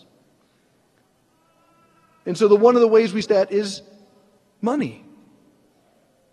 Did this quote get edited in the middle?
yes; 1 cut; at 3.2 s

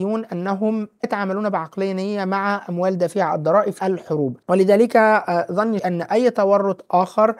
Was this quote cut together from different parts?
yes; 4 cuts; at 1.0 s, 3.8 s, 4.4 s, 5.8 s

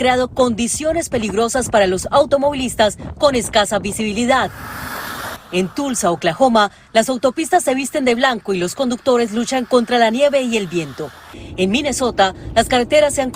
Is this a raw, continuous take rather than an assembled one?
yes; 0 cuts

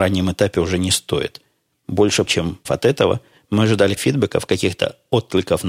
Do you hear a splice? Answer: yes; 3 cuts; at 2.3 s, 2.7 s, 4.0 s

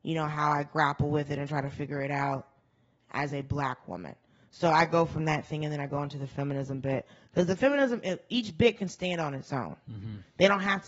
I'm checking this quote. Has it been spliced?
no; 0 cuts

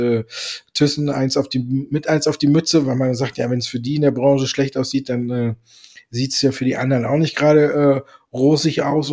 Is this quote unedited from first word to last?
yes; 0 cuts

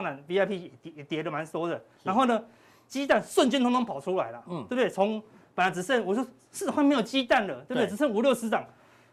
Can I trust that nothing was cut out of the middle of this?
yes; 0 cuts

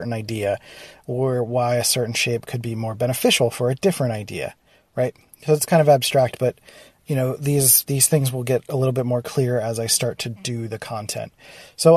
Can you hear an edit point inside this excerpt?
no; 0 cuts

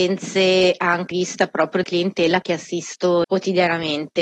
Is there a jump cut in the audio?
yes; 4 cuts; at 1.1 s, 1.8 s, 2.4 s, 3.2 s

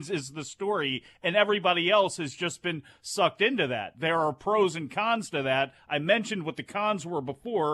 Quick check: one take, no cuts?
yes; 0 cuts

